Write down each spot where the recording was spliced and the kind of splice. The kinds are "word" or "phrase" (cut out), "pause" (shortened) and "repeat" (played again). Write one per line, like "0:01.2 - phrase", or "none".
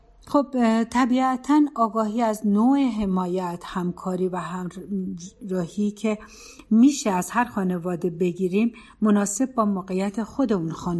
none